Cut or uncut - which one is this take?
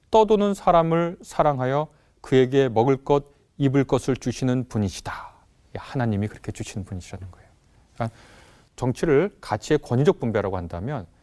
uncut